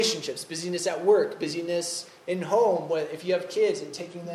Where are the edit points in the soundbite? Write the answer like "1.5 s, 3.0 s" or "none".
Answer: none